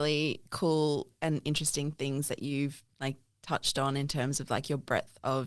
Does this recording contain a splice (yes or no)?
no